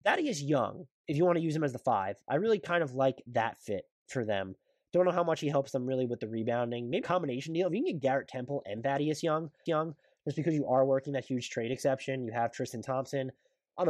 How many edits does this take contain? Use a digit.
3